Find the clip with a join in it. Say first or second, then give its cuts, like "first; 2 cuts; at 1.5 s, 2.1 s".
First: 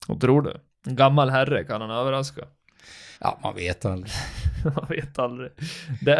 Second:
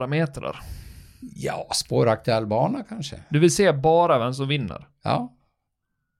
first; 1 cut; at 3.2 s